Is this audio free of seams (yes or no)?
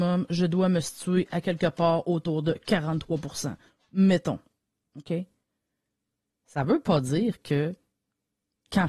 yes